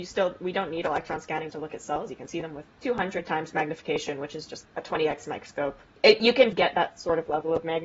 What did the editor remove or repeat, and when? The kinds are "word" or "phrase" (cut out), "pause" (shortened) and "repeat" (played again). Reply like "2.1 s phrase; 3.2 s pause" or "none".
1.5 s word; 4.6 s word; 5.9 s pause; 6.5 s phrase